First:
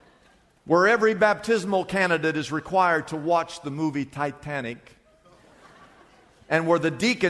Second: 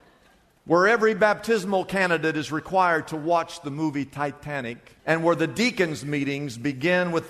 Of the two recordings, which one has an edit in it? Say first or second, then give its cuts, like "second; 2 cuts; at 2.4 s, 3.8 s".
second; 1 cut; at 5.0 s